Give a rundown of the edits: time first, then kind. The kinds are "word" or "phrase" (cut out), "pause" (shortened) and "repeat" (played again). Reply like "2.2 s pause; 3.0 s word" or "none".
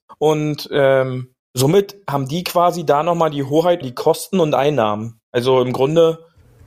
1.4 s pause; 3.8 s word